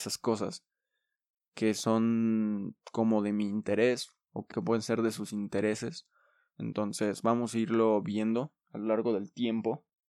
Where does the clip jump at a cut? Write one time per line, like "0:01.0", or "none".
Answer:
0:04.5